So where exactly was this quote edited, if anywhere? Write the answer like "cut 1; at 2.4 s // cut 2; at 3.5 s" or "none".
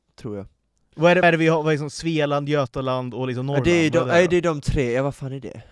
cut 1; at 1.2 s